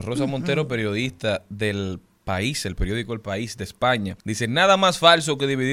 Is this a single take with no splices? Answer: no; 1 cut; at 4.2 s

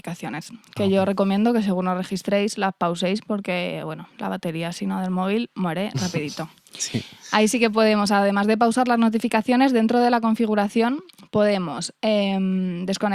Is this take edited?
no; 0 cuts

